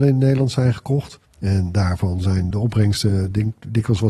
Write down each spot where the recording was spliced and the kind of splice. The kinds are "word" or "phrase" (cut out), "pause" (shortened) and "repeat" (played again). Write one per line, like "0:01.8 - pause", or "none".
0:01.2 - pause
0:02.5 - word